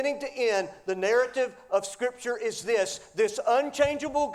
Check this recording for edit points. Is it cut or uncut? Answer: uncut